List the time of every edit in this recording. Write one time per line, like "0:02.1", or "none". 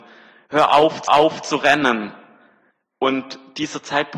0:01.1